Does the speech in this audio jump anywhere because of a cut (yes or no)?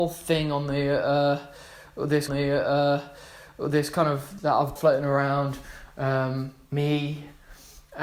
yes